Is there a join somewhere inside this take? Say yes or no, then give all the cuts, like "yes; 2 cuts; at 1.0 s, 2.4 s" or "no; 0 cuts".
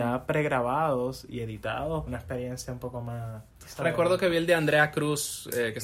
yes; 1 cut; at 2.1 s